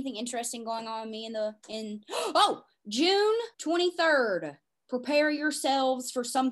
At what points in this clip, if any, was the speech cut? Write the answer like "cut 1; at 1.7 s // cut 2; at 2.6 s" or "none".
cut 1; at 3.5 s